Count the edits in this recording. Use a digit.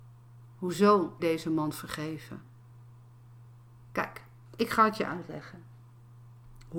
1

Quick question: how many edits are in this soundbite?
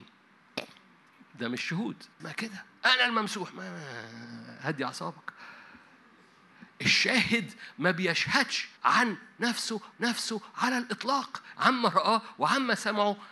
5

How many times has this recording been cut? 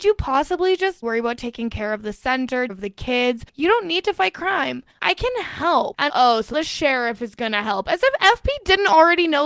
4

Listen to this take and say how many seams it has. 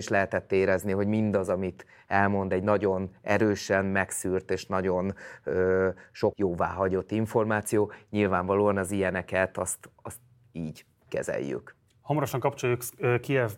1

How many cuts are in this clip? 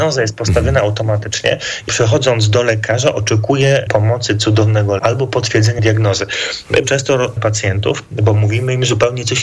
6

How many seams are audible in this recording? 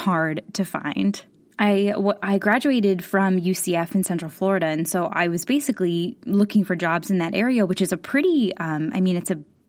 0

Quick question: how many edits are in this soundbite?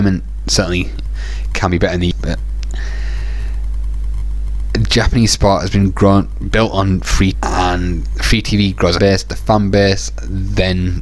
3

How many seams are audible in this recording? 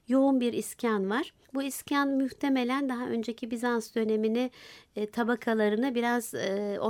1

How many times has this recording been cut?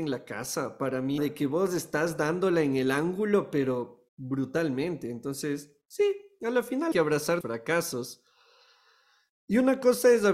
4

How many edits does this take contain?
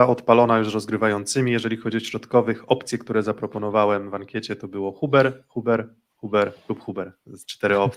0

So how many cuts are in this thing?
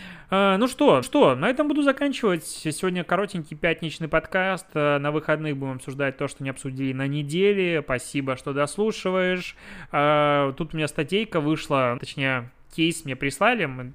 2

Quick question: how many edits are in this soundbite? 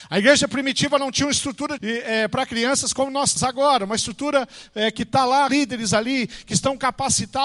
3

